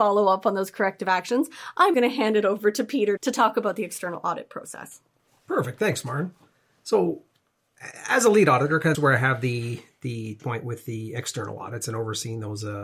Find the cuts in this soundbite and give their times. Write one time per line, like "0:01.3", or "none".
0:01.9
0:03.2
0:08.9
0:10.4